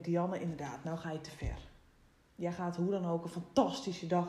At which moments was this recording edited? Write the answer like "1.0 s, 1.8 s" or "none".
none

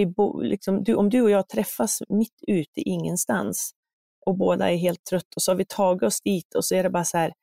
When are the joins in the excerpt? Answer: none

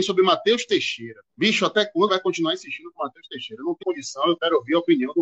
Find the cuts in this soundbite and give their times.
1.3 s, 2.1 s, 3.8 s

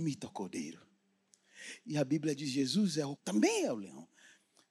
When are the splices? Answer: 3.2 s

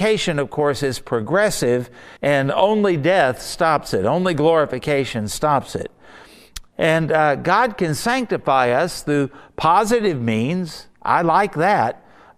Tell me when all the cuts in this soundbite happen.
2.2 s

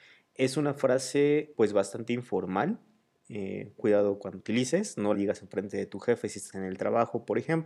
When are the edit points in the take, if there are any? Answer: 1.5 s, 3.8 s, 4.4 s, 5.1 s, 6.5 s

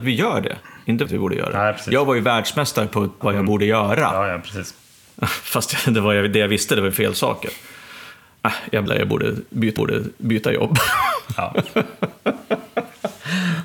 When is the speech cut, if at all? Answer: 1.1 s, 3.2 s, 6.9 s, 8.9 s, 9.8 s

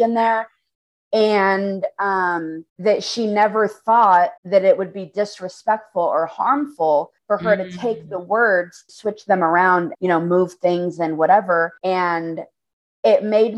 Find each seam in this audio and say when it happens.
2.7 s, 4.4 s, 7.2 s, 8.9 s, 9.9 s, 11.8 s

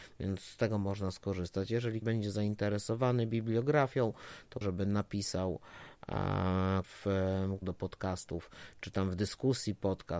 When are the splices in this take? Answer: 2.0 s, 4.6 s, 6.8 s, 7.6 s

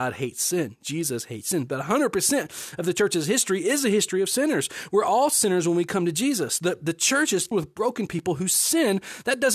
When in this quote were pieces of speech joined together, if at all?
7.5 s

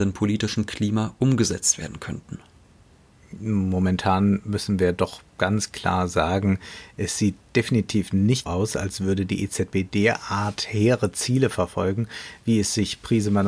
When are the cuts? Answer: 8.5 s

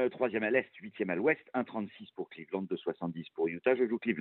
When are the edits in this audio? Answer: none

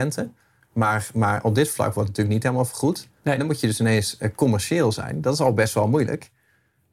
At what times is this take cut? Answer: none

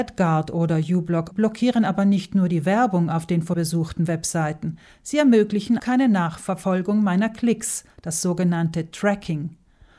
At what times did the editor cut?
1.3 s, 3.5 s, 5.8 s

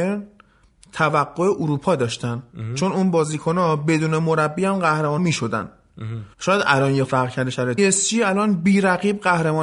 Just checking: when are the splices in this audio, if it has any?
5.2 s, 6.3 s, 7.0 s, 7.8 s

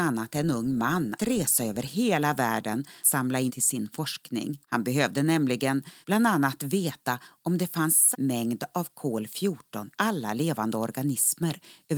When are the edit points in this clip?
1.2 s, 3.0 s, 3.5 s, 4.6 s, 6.0 s, 8.1 s, 9.9 s

